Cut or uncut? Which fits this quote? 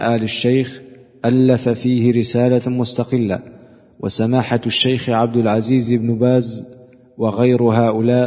uncut